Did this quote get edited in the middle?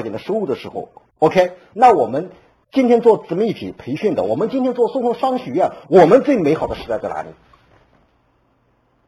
no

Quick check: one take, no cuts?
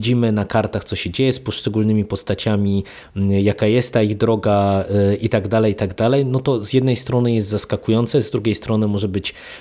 yes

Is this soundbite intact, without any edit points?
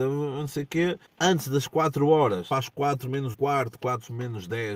no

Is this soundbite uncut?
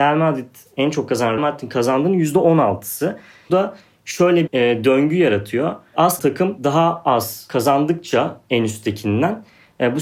no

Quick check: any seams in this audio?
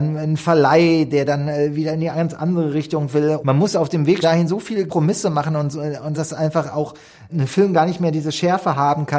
yes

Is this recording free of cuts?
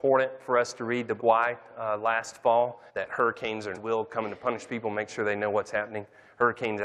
no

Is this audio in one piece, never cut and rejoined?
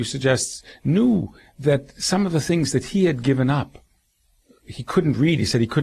yes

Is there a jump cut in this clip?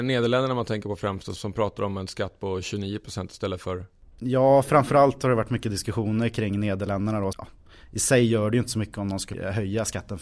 yes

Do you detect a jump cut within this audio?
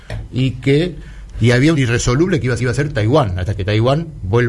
yes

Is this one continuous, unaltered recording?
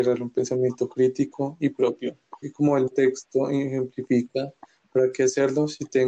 no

